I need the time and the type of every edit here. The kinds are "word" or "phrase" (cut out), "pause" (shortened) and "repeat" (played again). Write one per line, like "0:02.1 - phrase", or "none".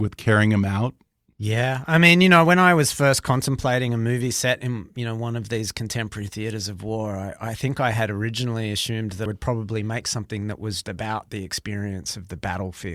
0:09.3 - word
0:10.8 - word

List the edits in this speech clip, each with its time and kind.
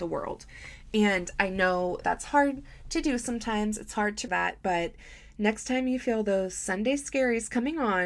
0:02.0 - word
0:04.3 - word

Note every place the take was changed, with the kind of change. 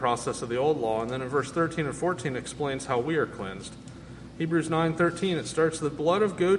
none

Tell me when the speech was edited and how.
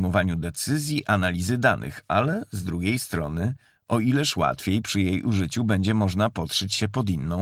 none

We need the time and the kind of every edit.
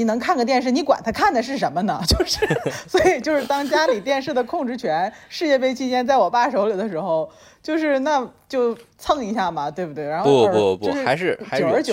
none

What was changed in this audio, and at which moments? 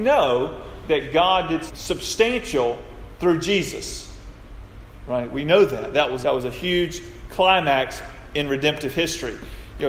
0:01.7 - word
0:06.2 - word

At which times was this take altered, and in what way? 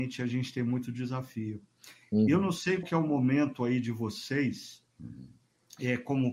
0:02.8 - word

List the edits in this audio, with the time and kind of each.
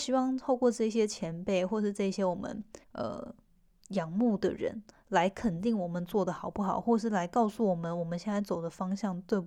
0:02.8 - pause

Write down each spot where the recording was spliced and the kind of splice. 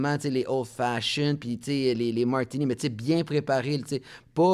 none

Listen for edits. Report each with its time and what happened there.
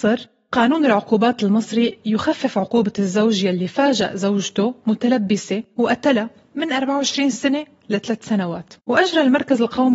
0:08.8 - pause

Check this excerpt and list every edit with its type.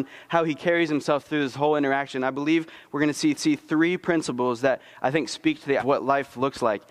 0:03.4 - repeat
0:05.8 - phrase

